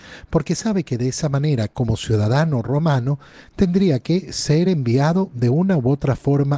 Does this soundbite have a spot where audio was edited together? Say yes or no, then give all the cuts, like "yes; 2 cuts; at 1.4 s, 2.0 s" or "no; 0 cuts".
no; 0 cuts